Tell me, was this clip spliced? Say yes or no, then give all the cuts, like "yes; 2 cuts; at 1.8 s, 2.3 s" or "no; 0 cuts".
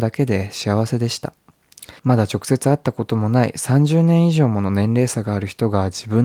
yes; 1 cut; at 2.0 s